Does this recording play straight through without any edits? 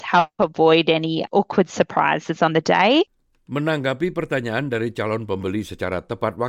yes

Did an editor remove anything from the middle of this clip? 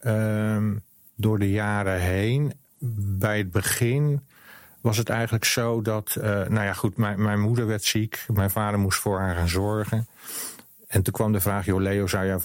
no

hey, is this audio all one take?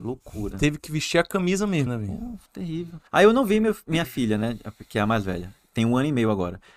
no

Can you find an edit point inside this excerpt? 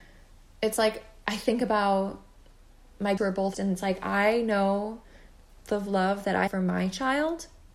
yes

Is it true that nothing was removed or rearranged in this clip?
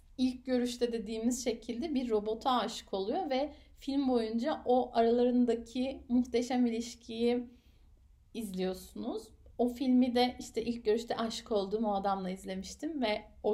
yes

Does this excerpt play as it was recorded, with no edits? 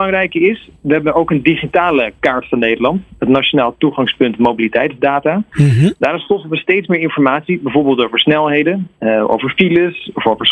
yes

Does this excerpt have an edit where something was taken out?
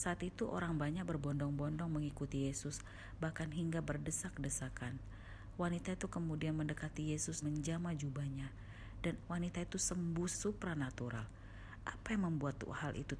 yes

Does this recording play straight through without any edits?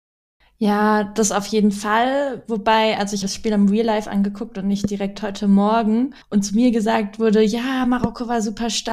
no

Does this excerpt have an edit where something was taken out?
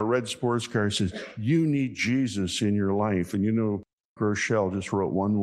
yes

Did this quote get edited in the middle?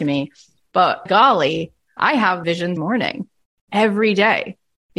yes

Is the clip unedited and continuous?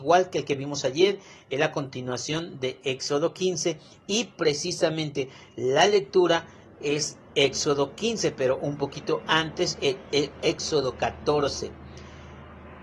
yes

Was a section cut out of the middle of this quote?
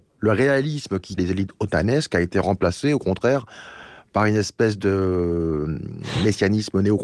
yes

